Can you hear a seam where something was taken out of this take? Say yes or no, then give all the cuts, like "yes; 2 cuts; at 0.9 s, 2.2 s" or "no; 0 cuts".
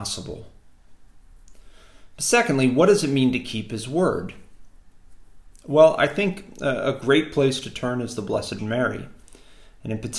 yes; 1 cut; at 8.6 s